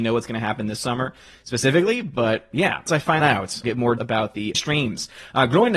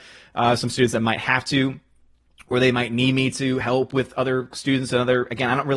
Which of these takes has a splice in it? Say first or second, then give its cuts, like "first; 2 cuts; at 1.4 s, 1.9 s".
first; 5 cuts; at 2.9 s, 3.2 s, 3.6 s, 4.0 s, 4.5 s